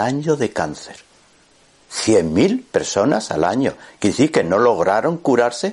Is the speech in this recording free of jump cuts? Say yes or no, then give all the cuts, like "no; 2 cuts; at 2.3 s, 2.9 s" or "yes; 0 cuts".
yes; 0 cuts